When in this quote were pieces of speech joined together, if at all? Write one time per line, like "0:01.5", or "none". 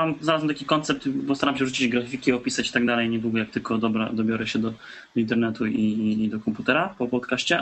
none